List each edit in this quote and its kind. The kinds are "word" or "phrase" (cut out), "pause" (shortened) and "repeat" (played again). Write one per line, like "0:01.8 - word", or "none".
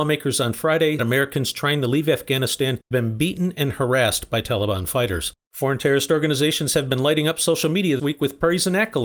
0:01.0 - word
0:02.9 - word
0:05.4 - pause
0:08.0 - word